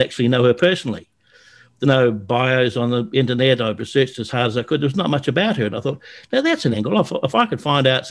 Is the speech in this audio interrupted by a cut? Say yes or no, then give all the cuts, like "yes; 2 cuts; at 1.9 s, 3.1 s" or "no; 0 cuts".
yes; 2 cuts; at 1.8 s, 6.7 s